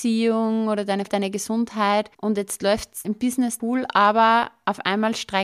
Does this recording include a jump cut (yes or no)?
yes